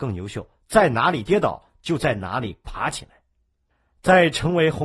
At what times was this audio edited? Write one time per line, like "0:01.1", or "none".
0:03.7